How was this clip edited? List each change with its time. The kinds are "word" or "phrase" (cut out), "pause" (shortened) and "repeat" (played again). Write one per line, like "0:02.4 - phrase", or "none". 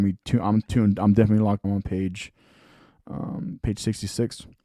0:01.6 - word